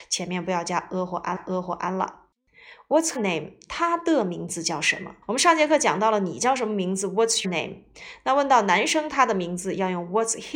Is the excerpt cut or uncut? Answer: cut